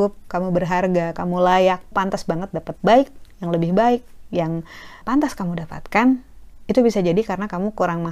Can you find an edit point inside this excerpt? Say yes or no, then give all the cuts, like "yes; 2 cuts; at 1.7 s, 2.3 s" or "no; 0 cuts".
yes; 3 cuts; at 1.9 s, 2.8 s, 5.0 s